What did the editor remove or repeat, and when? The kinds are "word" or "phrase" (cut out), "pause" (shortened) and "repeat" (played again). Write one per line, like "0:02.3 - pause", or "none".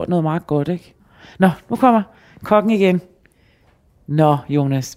none

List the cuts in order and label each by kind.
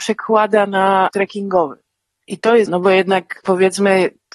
0:01.1 - word
0:02.7 - word

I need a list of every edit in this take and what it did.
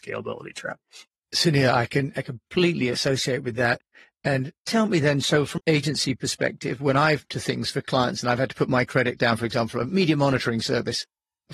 0:04.7 - word
0:05.6 - word
0:07.3 - word
0:09.2 - word

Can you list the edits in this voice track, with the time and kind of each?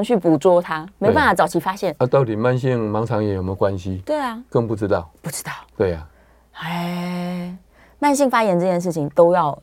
none

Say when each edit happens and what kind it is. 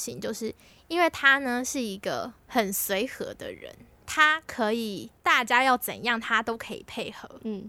0:02.4 - pause
0:05.2 - pause

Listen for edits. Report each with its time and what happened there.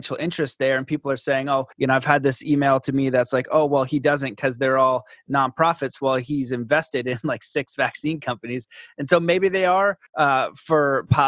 0:01.7 - pause
0:10.1 - pause

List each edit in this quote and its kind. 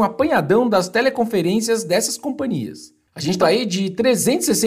0:03.4 - word

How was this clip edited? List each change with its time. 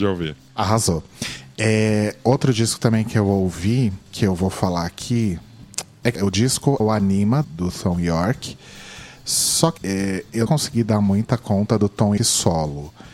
0:04.1 - pause
0:06.1 - word
0:06.8 - word
0:07.4 - word
0:09.8 - word
0:10.5 - word
0:12.2 - word

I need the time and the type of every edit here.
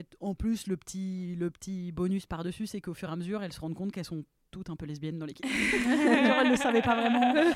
none

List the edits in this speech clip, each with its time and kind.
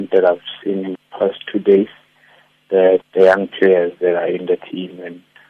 0:00.9 - word
0:03.0 - word

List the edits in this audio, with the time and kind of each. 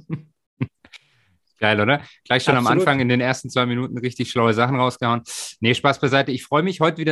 none

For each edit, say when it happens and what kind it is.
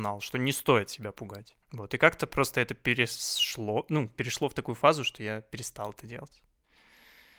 0:01.6 - pause

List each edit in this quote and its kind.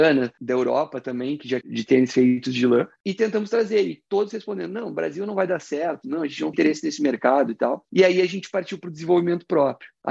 0:01.6 - phrase
0:06.5 - word

